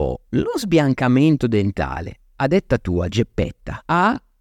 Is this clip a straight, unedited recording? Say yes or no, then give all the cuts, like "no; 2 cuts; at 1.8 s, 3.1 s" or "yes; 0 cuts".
yes; 0 cuts